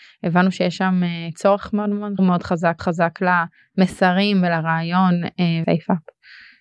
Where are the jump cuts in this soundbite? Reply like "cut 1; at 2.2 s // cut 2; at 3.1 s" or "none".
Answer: cut 1; at 1.3 s // cut 2; at 2.2 s // cut 3; at 2.8 s // cut 4; at 5.6 s